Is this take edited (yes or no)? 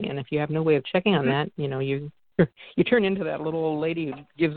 no